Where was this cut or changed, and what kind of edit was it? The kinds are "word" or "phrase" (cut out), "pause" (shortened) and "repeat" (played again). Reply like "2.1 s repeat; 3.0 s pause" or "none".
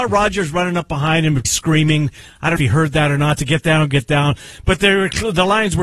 1.4 s word; 2.6 s phrase